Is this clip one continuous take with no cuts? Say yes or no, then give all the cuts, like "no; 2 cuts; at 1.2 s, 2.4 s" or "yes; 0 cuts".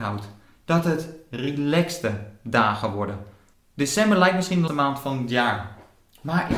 no; 2 cuts; at 3.5 s, 4.7 s